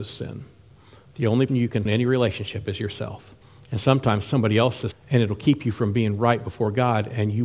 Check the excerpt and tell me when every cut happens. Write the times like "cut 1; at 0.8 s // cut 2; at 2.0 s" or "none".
cut 1; at 1.5 s // cut 2; at 1.8 s // cut 3; at 3.4 s // cut 4; at 4.9 s